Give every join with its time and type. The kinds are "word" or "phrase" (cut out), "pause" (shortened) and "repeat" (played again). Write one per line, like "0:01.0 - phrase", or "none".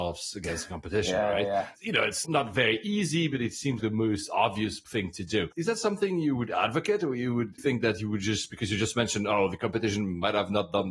0:02.2 - word
0:03.8 - word
0:07.6 - word